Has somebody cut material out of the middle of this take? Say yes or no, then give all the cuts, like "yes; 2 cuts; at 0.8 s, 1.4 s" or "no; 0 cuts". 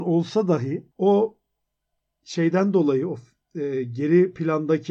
yes; 1 cut; at 0.9 s